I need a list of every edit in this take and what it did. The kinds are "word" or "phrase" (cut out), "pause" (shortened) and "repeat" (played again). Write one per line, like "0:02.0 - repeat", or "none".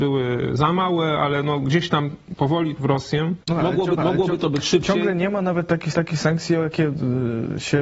0:02.8 - phrase
0:03.4 - pause
0:04.0 - repeat
0:05.9 - repeat